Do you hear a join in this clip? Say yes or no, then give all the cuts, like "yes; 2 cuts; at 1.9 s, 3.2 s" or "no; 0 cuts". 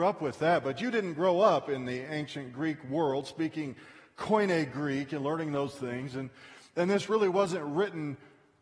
no; 0 cuts